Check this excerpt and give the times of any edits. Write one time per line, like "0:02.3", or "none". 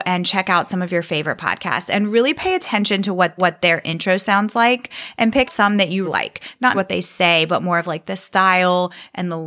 0:03.4
0:05.5
0:06.0
0:06.7